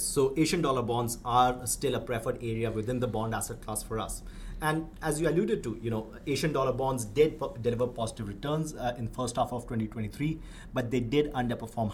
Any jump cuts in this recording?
no; 0 cuts

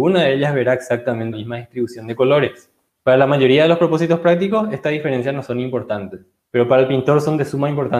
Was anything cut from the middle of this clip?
yes; 3 cuts; at 1.3 s, 2.9 s, 6.4 s

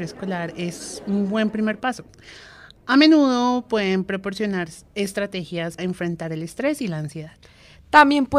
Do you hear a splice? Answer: yes; 1 cut; at 5.8 s

